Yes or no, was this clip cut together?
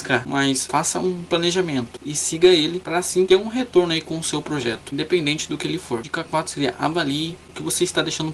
no